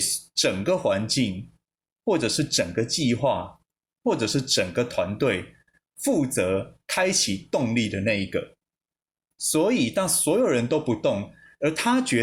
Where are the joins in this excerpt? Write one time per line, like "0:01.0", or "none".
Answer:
none

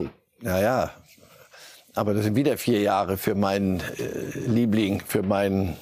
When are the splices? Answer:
none

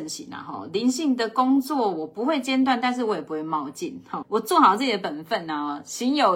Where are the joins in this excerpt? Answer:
0:04.2

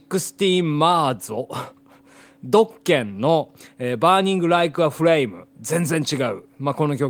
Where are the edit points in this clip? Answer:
0:05.5

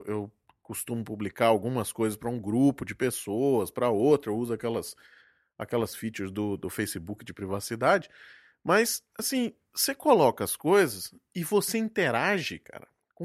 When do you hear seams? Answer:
none

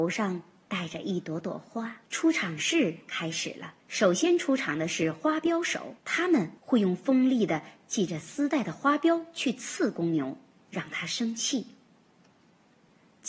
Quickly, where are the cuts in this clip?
0:02.0
0:03.8
0:06.0
0:06.6
0:10.6

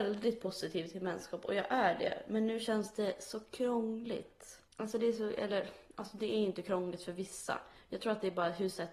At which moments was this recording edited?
0:04.7

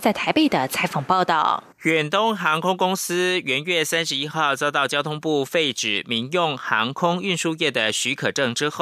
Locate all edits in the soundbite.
0:01.7

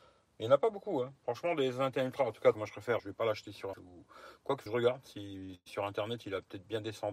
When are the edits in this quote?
0:02.5
0:03.0
0:03.7
0:04.7

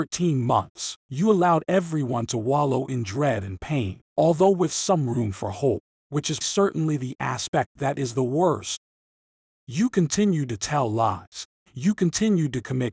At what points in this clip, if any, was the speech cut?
0:01.0
0:04.1
0:06.4

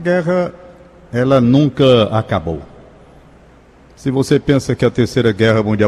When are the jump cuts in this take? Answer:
none

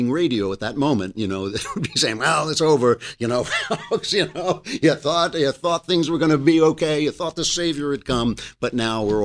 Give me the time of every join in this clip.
none

